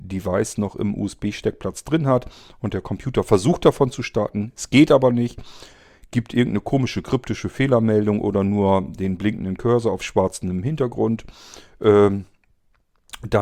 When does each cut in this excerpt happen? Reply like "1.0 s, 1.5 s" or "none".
none